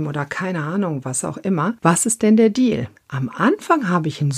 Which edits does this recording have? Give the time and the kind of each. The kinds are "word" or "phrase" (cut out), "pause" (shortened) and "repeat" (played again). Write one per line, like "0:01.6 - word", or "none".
0:01.8 - pause
0:03.0 - pause

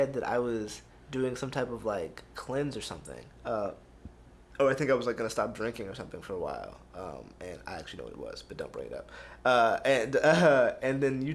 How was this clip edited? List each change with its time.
0:00.9 - pause
0:03.3 - pause

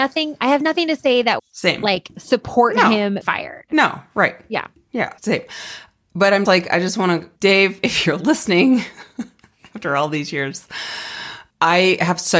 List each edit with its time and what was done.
0:01.4 - word
0:03.2 - word
0:05.2 - pause
0:06.5 - word
0:07.4 - pause
0:09.1 - pause

